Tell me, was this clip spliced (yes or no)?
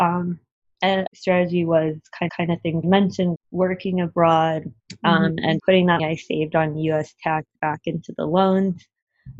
yes